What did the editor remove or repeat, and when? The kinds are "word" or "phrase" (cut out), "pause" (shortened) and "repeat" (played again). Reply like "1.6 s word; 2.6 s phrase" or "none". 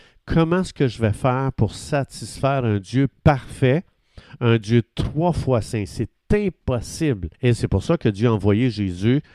7.3 s pause